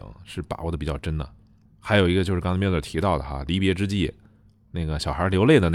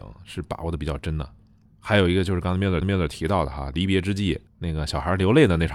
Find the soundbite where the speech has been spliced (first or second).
second